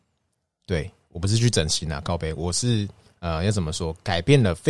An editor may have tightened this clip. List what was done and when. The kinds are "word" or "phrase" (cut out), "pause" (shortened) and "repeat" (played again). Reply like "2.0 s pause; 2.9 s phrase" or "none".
3.1 s pause